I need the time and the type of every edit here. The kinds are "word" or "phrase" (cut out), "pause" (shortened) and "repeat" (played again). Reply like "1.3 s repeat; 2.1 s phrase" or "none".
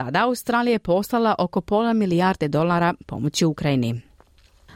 none